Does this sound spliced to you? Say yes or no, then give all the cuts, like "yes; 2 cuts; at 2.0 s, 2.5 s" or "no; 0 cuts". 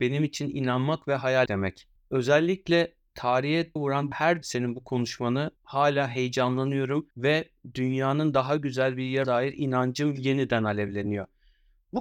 yes; 7 cuts; at 1.5 s, 3.8 s, 4.1 s, 4.4 s, 5.6 s, 7.1 s, 9.2 s